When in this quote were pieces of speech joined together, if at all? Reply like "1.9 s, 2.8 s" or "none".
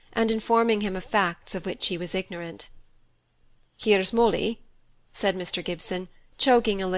none